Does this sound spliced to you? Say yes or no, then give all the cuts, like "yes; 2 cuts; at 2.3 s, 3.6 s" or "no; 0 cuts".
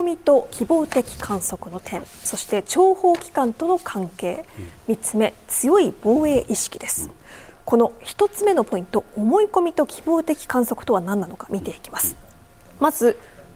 no; 0 cuts